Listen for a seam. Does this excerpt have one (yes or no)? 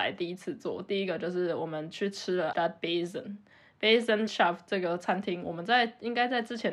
yes